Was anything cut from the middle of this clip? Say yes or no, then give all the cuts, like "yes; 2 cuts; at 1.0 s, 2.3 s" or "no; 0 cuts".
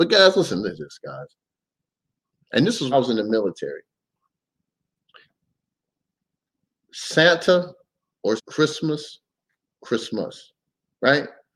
yes; 2 cuts; at 2.9 s, 8.4 s